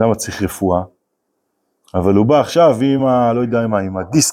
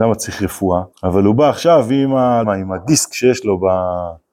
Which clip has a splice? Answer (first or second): second